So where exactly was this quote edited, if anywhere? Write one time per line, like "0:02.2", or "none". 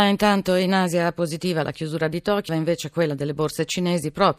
0:02.5